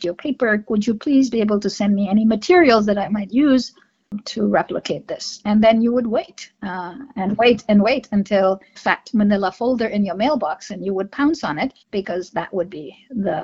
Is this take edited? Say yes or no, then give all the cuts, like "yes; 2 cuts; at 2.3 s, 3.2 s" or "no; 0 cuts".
yes; 2 cuts; at 8.7 s, 11.8 s